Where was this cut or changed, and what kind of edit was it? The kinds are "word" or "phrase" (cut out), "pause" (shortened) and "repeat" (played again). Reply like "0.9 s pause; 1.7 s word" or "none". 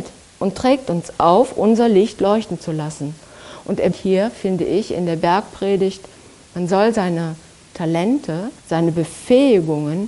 3.9 s word; 8.6 s pause

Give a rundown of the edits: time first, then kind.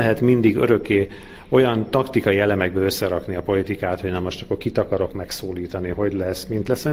none

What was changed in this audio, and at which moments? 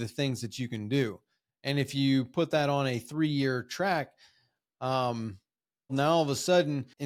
5.9 s word

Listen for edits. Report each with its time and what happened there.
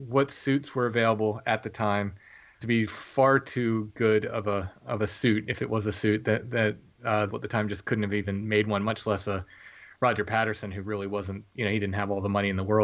2.6 s phrase; 7.3 s phrase

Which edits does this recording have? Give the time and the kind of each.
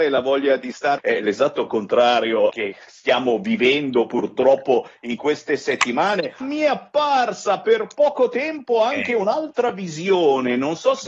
1.0 s word; 2.5 s word; 6.4 s word

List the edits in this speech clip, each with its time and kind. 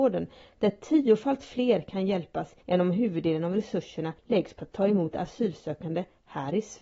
2.6 s pause; 4.2 s pause

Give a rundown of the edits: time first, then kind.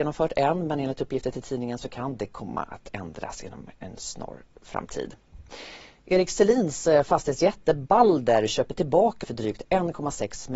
9.2 s word

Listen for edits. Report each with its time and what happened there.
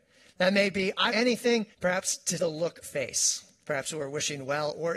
1.1 s phrase; 1.7 s pause; 2.4 s word; 2.8 s phrase

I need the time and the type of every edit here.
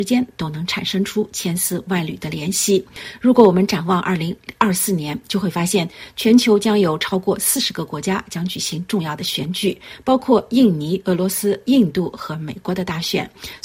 none

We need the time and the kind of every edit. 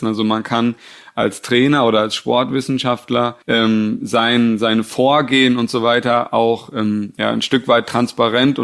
3.4 s pause

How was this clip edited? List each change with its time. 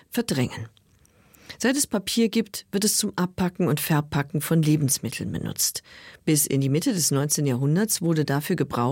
none

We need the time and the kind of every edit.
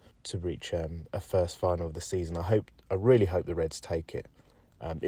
none

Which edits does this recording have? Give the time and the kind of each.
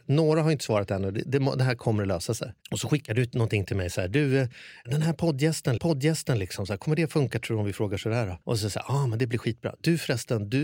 2.6 s pause; 5.8 s repeat; 8.4 s pause

